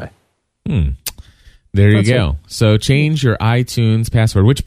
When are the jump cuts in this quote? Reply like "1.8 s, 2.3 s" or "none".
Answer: none